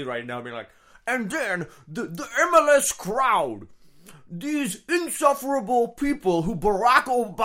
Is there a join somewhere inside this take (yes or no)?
no